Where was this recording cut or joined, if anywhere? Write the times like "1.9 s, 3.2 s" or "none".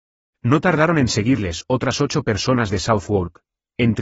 none